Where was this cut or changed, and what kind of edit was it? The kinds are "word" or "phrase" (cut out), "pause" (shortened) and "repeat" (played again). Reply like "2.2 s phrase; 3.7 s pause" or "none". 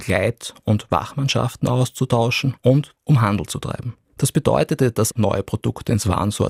4.0 s pause

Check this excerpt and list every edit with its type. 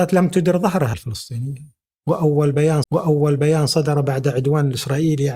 0.9 s word; 2.8 s repeat

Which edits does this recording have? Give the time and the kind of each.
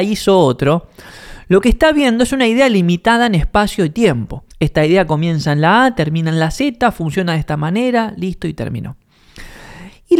4.5 s pause

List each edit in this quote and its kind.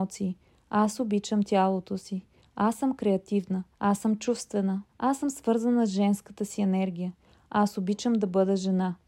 3.7 s pause; 4.9 s pause

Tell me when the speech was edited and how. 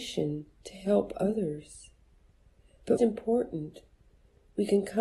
3.0 s word

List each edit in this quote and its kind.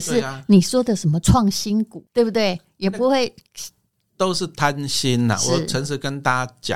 2.1 s pause

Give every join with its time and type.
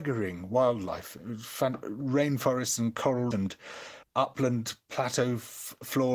1.8 s word; 3.3 s word; 4.0 s word

